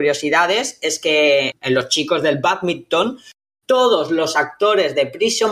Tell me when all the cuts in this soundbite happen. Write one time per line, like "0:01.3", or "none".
none